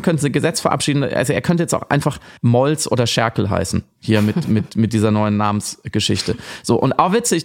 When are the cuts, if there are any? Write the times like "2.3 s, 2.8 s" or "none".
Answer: 2.4 s